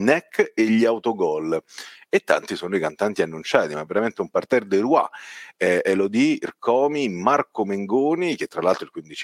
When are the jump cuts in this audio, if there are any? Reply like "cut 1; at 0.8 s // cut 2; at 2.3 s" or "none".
none